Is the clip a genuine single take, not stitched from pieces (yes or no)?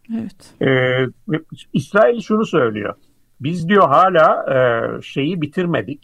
yes